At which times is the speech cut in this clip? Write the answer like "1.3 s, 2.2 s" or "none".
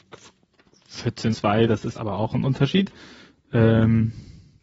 1.3 s, 1.9 s